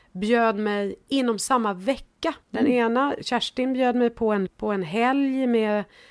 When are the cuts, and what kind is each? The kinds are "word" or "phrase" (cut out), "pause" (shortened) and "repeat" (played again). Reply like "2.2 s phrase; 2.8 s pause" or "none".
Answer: 2.4 s pause; 4.5 s word